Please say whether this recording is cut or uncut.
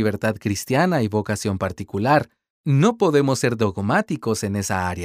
uncut